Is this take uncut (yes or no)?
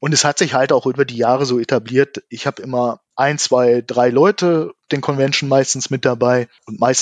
no